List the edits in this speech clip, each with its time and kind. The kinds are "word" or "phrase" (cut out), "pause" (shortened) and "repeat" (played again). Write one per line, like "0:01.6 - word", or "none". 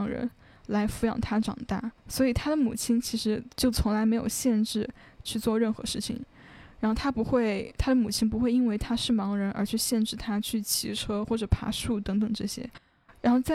0:02.0 - pause
0:03.5 - pause
0:05.3 - word